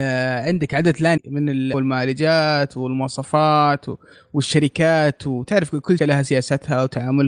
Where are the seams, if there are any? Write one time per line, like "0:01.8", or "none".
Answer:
0:01.2
0:01.7
0:06.0